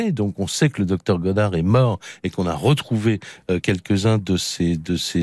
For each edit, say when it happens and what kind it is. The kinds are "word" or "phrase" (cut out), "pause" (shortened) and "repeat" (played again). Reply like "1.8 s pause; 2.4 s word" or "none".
none